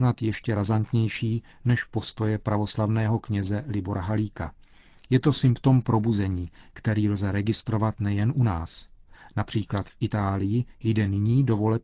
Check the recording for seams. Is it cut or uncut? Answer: uncut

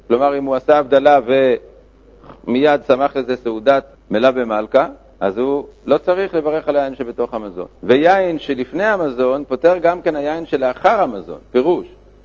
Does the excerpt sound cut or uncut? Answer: cut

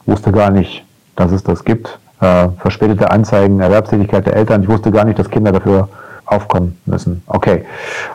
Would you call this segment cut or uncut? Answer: cut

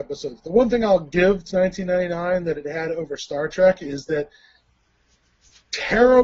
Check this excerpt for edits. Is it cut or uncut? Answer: cut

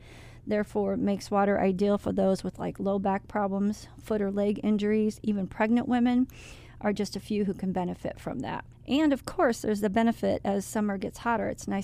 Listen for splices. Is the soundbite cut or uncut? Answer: uncut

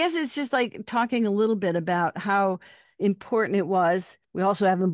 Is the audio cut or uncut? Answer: uncut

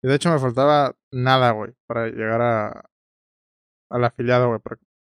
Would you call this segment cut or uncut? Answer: cut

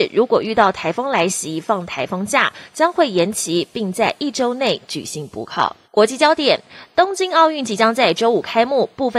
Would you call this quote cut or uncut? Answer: cut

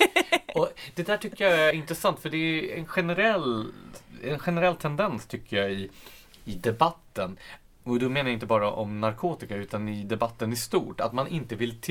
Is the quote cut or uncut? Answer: cut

